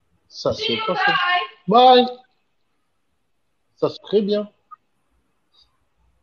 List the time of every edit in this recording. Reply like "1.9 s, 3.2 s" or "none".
4.0 s